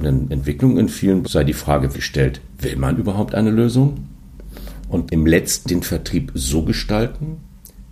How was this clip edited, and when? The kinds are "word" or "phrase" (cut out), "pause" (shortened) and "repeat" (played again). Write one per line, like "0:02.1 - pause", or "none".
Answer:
0:01.2 - word
0:01.9 - word
0:05.1 - word
0:05.6 - word